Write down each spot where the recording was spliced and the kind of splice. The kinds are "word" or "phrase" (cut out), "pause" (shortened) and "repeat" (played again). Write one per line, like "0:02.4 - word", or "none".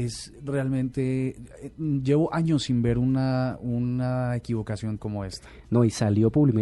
0:05.0 - phrase